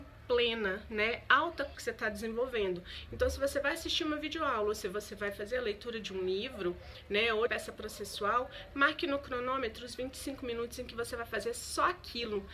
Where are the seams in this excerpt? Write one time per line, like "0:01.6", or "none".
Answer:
0:01.7
0:07.5